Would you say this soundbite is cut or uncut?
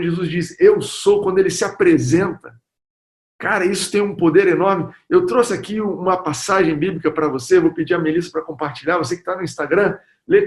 uncut